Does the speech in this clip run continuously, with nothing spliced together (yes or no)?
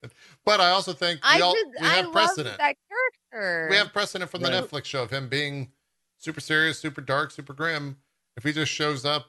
yes